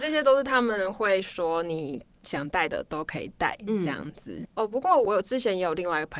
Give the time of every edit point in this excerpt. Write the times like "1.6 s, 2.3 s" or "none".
none